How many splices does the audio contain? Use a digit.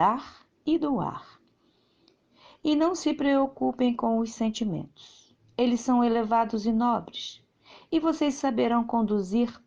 0